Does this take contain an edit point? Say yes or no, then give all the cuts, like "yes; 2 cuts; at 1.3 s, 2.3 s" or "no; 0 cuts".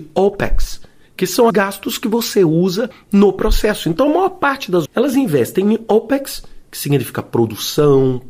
yes; 2 cuts; at 1.5 s, 4.8 s